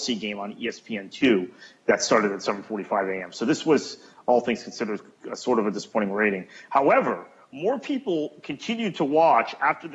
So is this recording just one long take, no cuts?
yes; 0 cuts

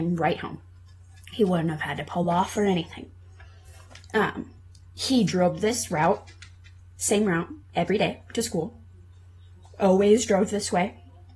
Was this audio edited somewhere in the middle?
no; 0 cuts

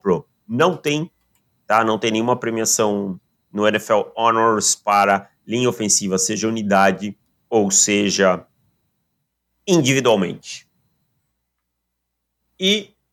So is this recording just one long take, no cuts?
yes; 0 cuts

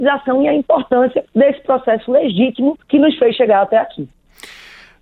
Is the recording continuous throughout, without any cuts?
no; 2 cuts; at 1.3 s, 2.8 s

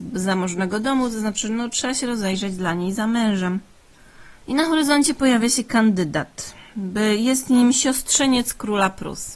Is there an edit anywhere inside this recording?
no; 0 cuts

